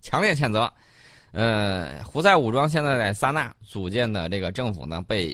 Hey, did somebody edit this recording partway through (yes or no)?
no